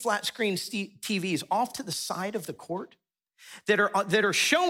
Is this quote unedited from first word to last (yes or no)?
yes